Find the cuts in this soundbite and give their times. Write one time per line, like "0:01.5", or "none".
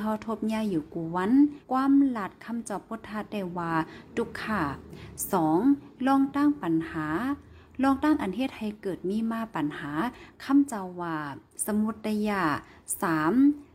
0:01.6
0:11.5